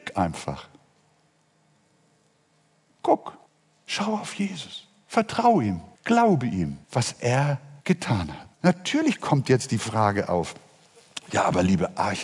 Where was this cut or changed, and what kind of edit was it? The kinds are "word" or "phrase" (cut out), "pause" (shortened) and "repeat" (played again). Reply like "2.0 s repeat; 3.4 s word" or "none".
3.5 s pause; 5.9 s pause; 6.8 s pause; 7.8 s pause; 8.5 s pause